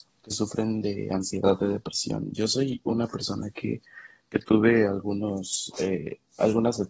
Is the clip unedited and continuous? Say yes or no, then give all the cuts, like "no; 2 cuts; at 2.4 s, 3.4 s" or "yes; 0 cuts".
yes; 0 cuts